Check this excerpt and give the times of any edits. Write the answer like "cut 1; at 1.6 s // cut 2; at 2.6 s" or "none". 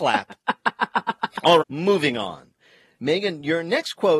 cut 1; at 1.6 s

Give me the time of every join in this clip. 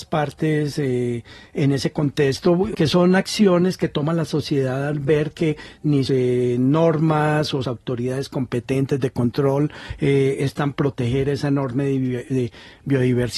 cut 1; at 2.7 s // cut 2; at 6.1 s // cut 3; at 7.6 s // cut 4; at 10.7 s

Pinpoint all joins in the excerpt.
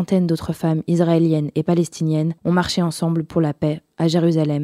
cut 1; at 2.4 s

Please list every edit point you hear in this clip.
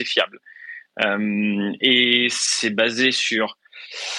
none

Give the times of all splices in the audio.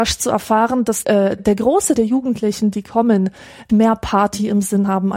cut 1; at 1.0 s // cut 2; at 1.4 s // cut 3; at 2.0 s // cut 4; at 3.7 s

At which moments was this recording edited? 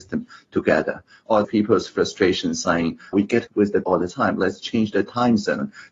cut 1; at 1.4 s // cut 2; at 3.1 s // cut 3; at 3.5 s // cut 4; at 3.8 s

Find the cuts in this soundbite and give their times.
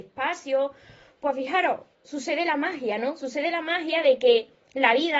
none

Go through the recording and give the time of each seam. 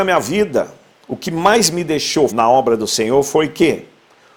cut 1; at 2.3 s

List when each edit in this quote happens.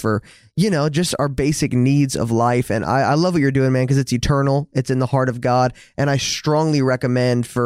none

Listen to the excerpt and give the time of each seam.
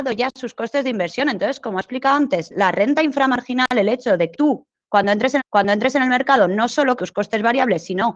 cut 1; at 4.3 s // cut 2; at 5.4 s // cut 3; at 7.0 s

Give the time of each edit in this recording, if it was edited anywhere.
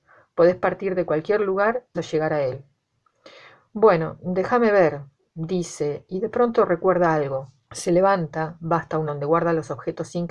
cut 1; at 1.9 s // cut 2; at 7.6 s // cut 3; at 9.1 s

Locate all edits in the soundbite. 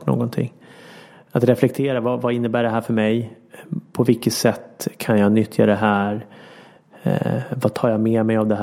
none

